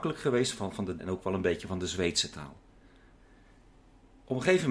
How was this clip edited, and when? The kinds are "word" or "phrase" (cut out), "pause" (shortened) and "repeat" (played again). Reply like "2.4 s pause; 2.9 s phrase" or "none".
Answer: 1.0 s word